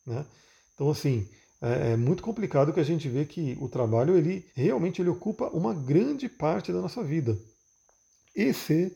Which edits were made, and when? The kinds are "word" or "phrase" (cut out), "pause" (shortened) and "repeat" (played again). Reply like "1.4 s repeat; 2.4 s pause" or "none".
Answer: 4.5 s pause